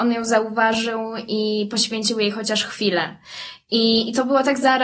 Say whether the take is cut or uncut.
uncut